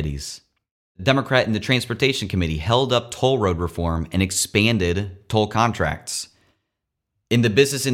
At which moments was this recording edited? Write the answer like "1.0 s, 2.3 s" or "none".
none

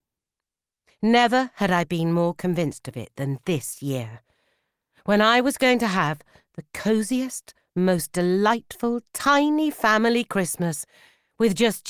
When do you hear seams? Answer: none

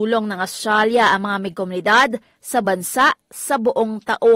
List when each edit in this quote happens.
1.5 s, 2.6 s

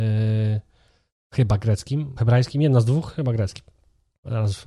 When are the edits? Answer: 2.2 s

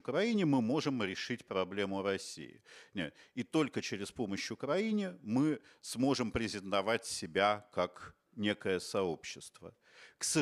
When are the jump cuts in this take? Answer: 8.3 s

